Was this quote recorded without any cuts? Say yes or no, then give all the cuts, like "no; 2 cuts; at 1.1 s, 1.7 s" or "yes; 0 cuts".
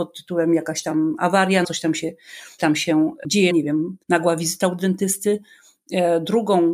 no; 4 cuts; at 1.6 s, 2.6 s, 3.5 s, 4.0 s